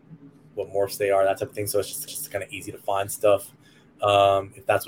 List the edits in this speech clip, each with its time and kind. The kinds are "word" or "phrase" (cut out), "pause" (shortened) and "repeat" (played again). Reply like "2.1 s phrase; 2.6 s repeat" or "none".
2.1 s repeat